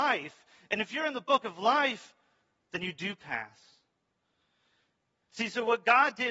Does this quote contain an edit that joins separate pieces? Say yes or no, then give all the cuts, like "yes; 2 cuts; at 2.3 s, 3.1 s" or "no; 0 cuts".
no; 0 cuts